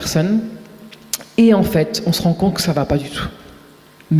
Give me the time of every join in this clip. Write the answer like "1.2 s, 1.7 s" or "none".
none